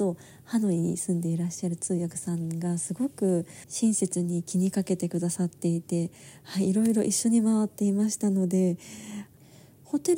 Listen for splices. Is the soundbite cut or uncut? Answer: uncut